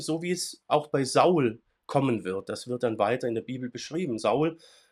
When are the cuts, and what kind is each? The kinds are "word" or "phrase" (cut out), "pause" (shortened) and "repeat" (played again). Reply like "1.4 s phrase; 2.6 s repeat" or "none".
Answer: none

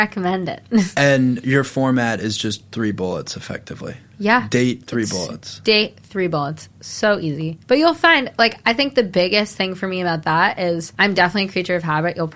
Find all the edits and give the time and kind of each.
7.6 s pause; 10.9 s pause

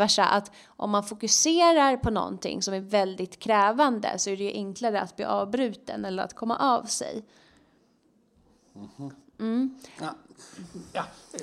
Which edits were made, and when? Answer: none

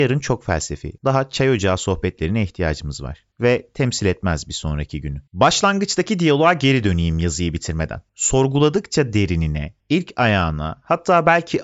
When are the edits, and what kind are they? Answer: 1.0 s pause; 5.3 s pause; 8.1 s pause; 9.8 s pause

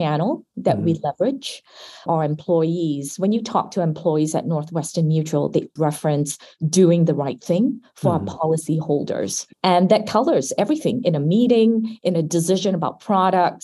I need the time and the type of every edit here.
2.1 s phrase; 5.8 s word; 9.5 s pause

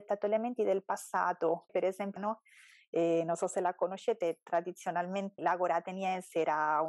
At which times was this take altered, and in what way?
1.7 s word; 2.2 s word; 5.4 s word

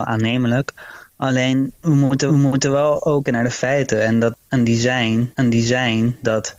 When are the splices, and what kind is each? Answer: 2.3 s repeat; 3.3 s phrase; 5.3 s repeat

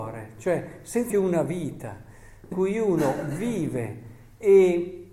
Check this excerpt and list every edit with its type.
1.1 s word; 2.5 s phrase

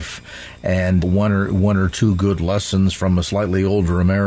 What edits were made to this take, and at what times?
1.0 s word

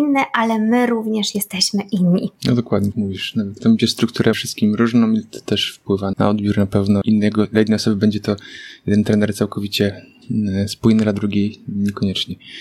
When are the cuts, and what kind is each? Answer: 2.9 s word; 3.6 s word; 4.3 s phrase; 6.1 s word; 7.0 s word

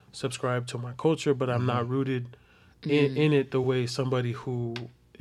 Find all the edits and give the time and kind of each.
none

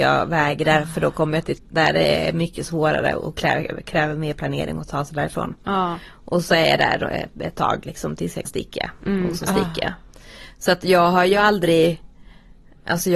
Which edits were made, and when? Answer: 1.6 s word; 8.5 s word

